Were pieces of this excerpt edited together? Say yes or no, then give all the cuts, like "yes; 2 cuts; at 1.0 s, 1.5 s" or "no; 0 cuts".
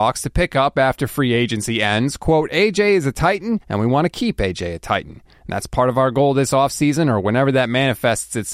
yes; 1 cut; at 3.6 s